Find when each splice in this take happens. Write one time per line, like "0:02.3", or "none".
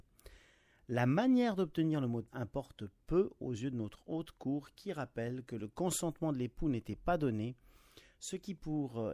0:02.3